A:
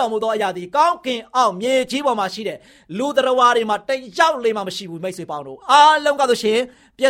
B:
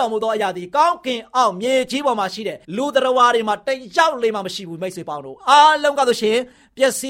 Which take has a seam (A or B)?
B